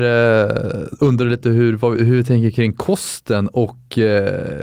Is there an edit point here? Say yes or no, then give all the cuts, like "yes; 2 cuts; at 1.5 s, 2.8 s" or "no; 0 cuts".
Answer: no; 0 cuts